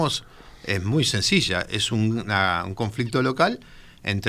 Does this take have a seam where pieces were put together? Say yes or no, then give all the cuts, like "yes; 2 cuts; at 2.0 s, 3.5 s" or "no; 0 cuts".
no; 0 cuts